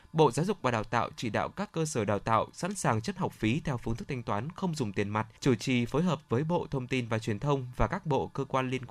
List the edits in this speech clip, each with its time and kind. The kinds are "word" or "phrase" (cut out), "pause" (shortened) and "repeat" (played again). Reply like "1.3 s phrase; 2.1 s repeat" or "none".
3.2 s phrase; 5.4 s pause